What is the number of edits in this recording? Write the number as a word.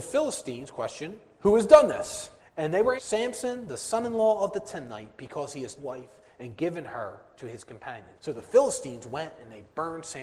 four